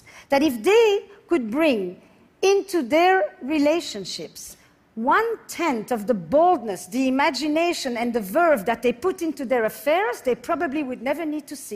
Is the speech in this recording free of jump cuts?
yes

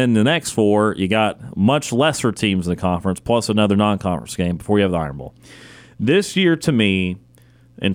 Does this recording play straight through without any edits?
yes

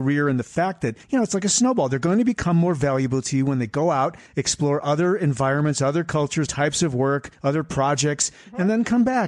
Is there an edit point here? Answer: yes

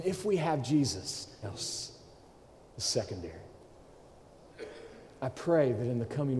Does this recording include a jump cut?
yes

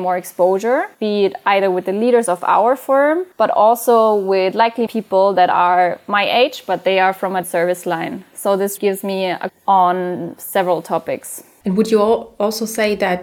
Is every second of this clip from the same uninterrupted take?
no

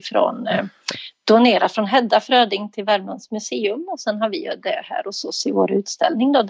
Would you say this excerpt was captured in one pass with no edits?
yes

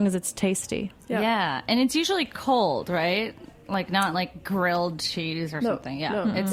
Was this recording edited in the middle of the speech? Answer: no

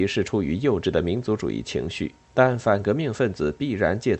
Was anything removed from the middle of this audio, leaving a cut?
yes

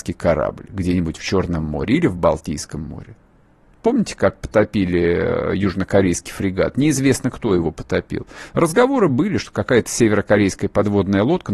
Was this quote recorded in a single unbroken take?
yes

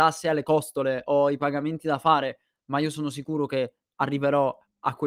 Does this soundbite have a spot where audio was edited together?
no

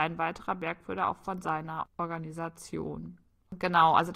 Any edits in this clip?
no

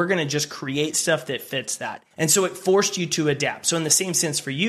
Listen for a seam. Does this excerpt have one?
yes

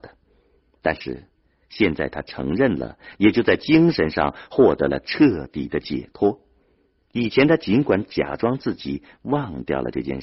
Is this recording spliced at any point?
no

